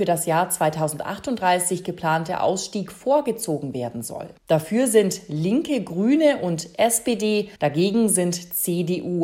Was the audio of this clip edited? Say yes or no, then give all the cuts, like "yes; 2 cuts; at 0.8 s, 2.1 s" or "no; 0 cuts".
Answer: yes; 2 cuts; at 4.4 s, 7.6 s